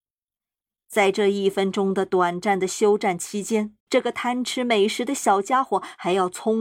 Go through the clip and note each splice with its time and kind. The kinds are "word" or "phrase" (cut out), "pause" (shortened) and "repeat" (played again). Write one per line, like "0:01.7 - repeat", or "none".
0:03.8 - pause